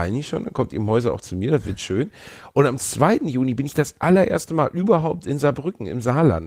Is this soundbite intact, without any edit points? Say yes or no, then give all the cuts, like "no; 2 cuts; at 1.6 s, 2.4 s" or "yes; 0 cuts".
yes; 0 cuts